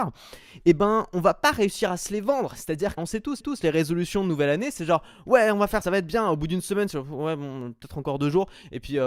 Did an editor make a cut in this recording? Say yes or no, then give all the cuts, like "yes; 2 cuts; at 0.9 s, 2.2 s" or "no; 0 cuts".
yes; 3 cuts; at 3.0 s, 3.4 s, 5.8 s